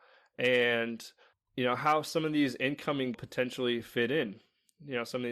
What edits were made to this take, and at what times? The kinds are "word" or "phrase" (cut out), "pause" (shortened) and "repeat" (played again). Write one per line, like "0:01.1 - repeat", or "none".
0:03.1 - phrase